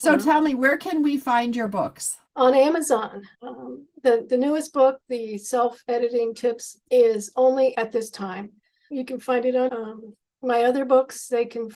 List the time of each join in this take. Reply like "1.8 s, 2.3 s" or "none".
2.3 s, 3.3 s, 6.9 s, 7.7 s, 8.9 s, 9.7 s